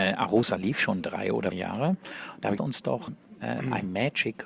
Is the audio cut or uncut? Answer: cut